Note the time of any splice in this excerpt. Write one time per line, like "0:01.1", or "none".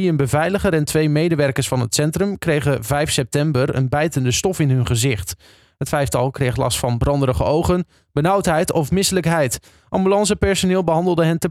none